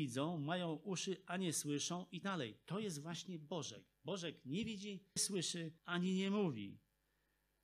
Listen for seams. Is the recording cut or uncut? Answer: cut